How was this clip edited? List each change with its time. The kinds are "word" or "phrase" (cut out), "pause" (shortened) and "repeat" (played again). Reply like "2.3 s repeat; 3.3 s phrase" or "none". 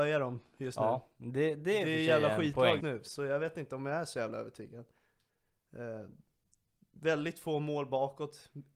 2.8 s word